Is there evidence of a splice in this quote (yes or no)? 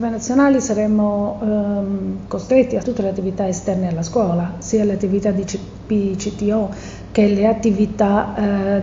yes